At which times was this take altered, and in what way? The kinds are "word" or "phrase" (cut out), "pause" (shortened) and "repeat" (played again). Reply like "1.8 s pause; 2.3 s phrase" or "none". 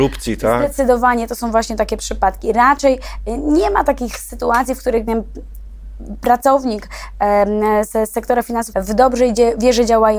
5.1 s word; 8.7 s word